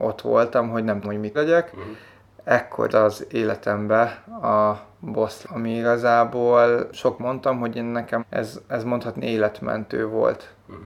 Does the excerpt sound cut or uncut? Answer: cut